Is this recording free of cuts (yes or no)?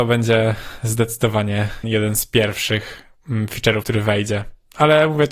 no